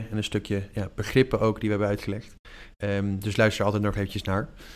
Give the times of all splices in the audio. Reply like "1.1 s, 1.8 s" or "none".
none